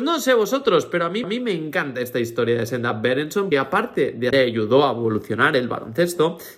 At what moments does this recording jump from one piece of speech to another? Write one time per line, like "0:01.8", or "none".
0:01.2
0:03.5
0:04.3